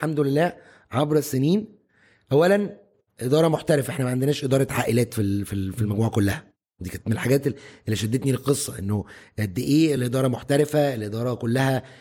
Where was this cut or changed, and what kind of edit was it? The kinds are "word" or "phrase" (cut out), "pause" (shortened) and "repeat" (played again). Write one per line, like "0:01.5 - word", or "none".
none